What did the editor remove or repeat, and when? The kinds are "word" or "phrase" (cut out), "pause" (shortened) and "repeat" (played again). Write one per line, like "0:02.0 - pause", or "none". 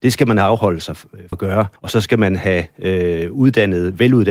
0:01.3 - word
0:01.8 - pause